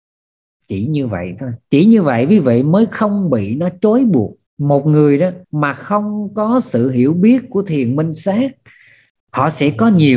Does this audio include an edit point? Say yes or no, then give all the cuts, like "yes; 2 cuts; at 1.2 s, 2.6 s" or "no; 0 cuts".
yes; 3 cuts; at 1.6 s, 4.5 s, 5.4 s